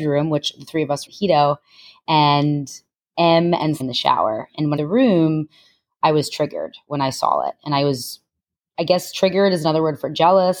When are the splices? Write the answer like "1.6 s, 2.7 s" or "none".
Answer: 1.1 s, 3.8 s, 4.8 s